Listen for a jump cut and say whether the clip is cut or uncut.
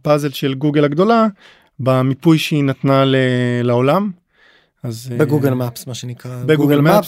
uncut